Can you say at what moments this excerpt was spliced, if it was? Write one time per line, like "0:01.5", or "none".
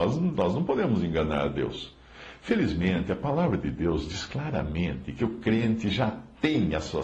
none